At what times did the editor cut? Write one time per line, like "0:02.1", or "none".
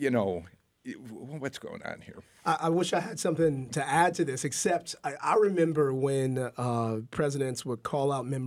none